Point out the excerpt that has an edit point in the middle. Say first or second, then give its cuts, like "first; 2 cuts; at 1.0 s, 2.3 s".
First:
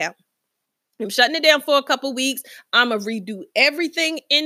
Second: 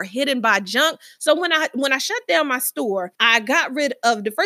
second; 1 cut; at 3.1 s